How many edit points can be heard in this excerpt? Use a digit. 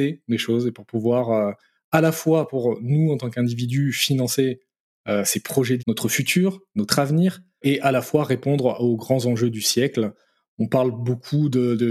1